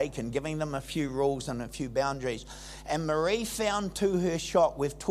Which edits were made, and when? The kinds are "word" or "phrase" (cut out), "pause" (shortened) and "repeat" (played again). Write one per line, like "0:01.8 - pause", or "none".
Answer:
none